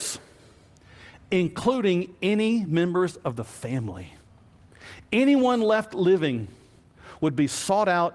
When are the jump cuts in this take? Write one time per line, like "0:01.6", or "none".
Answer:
none